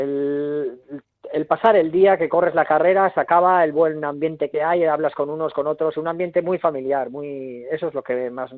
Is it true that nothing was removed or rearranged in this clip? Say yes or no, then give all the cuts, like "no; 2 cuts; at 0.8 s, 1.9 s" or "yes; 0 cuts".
yes; 0 cuts